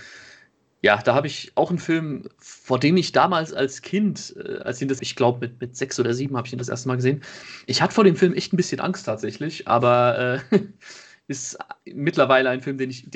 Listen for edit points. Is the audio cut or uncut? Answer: cut